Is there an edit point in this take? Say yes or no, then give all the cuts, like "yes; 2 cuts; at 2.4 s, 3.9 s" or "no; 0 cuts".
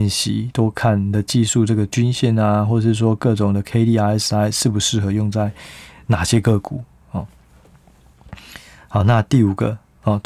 no; 0 cuts